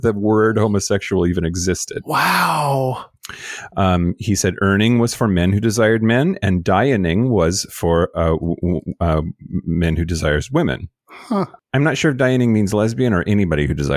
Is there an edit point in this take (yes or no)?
no